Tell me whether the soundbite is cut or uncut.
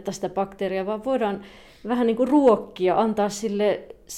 uncut